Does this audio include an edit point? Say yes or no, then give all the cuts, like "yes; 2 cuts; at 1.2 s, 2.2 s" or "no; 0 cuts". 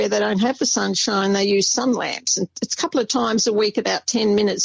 no; 0 cuts